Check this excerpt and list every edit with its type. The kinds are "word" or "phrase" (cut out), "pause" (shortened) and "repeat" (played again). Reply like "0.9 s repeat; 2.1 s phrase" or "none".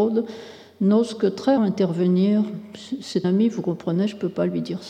1.6 s word; 3.2 s word